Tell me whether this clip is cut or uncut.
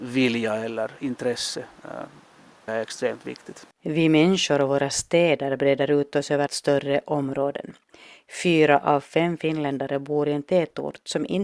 cut